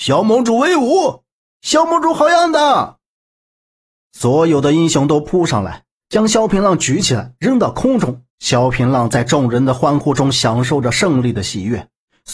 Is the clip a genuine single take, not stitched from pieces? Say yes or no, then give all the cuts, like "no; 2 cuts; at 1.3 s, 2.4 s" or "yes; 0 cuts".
no; 1 cut; at 8.3 s